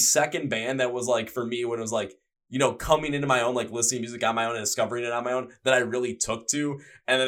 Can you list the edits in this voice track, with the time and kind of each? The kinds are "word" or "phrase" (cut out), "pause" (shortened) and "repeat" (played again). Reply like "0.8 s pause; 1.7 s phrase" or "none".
none